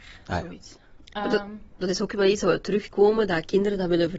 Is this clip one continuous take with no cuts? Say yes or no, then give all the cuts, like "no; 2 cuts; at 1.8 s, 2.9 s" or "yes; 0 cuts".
no; 1 cut; at 2.9 s